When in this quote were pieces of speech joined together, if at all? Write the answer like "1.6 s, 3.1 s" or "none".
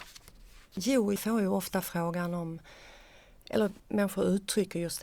1.2 s, 3.8 s